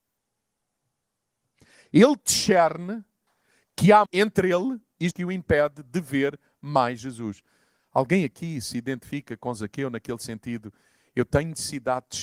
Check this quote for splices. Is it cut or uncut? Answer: cut